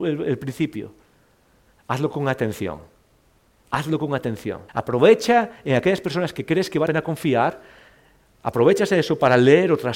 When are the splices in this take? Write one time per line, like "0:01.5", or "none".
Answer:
0:04.7
0:06.9